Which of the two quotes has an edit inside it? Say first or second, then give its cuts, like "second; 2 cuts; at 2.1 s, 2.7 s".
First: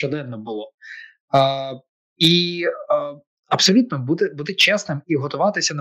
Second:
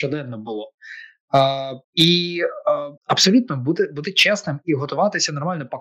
second; 2 cuts; at 1.8 s, 3.0 s